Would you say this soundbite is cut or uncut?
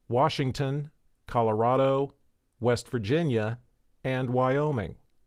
uncut